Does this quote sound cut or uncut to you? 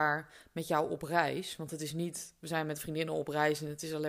uncut